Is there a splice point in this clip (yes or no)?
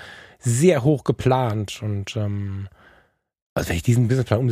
no